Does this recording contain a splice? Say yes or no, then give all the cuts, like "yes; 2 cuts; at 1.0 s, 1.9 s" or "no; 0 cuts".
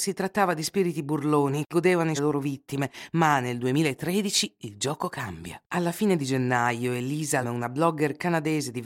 yes; 4 cuts; at 1.7 s, 2.2 s, 5.6 s, 7.4 s